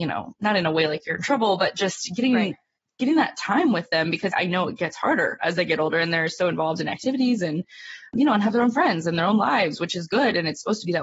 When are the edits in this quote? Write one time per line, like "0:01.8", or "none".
0:04.3

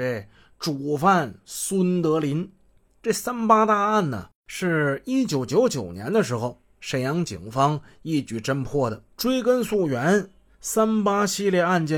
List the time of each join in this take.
0:04.4
0:09.1

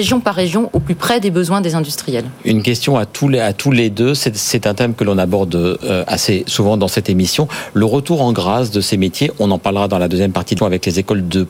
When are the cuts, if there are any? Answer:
0:10.6

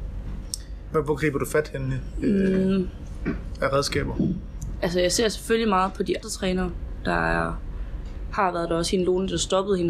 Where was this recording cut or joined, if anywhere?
0:06.2

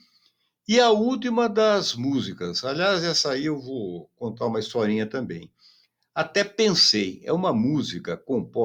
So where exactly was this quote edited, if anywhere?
none

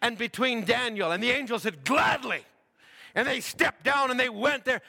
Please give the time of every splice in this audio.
none

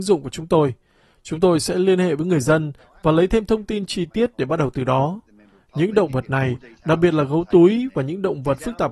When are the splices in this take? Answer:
none

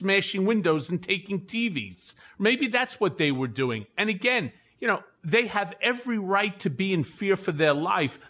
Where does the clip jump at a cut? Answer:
none

